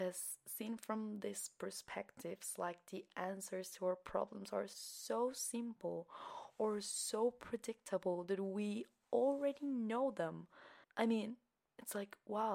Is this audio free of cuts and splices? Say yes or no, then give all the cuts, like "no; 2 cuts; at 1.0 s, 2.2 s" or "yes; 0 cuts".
no; 1 cut; at 10.8 s